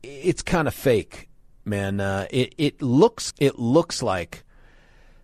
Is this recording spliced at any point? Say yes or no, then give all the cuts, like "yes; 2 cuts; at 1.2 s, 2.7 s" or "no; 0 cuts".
yes; 1 cut; at 3.3 s